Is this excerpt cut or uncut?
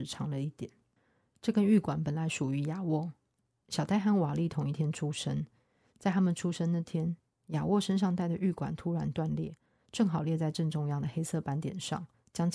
uncut